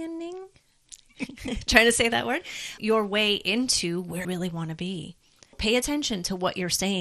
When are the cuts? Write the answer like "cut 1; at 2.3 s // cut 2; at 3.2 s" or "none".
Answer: cut 1; at 2.8 s // cut 2; at 4.2 s // cut 3; at 5.5 s